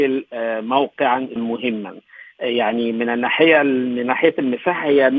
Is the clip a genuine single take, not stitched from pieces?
no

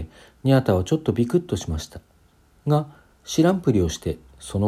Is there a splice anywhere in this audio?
no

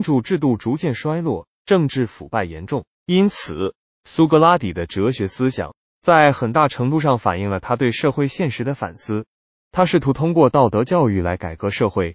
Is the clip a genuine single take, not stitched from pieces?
no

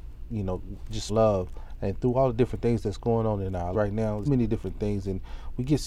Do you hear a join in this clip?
yes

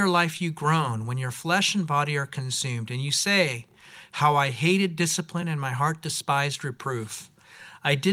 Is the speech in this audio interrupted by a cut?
no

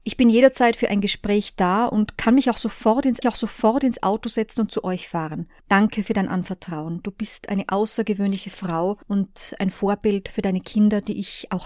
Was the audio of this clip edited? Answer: yes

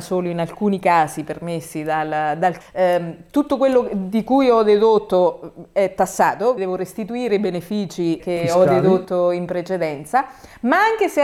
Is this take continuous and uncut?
no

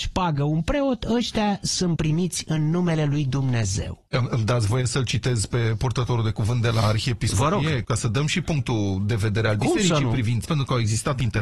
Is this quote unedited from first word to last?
no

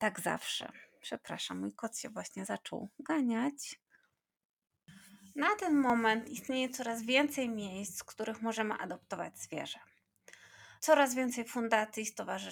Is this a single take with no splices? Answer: no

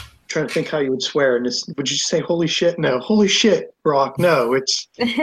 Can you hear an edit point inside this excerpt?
no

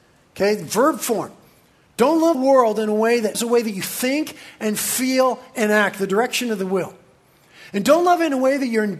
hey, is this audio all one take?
no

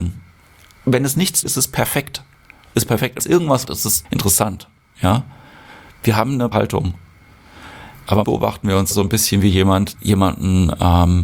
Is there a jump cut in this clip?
yes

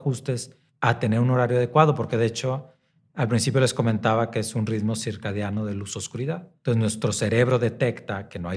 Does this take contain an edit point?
no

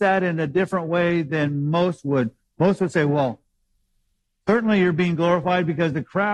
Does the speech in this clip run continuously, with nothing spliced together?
yes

